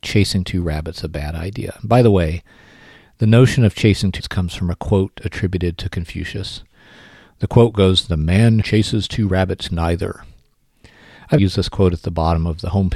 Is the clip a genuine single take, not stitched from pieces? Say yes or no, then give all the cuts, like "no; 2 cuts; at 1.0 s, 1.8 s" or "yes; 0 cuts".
no; 4 cuts; at 4.2 s, 8.6 s, 9.7 s, 11.4 s